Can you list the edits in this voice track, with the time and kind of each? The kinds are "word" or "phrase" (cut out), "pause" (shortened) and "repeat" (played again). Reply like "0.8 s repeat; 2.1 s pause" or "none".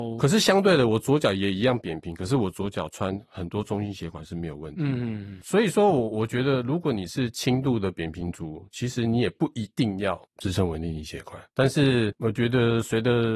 10.3 s pause; 11.5 s pause